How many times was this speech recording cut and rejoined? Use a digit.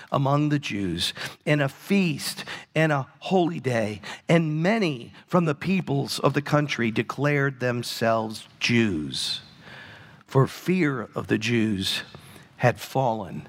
0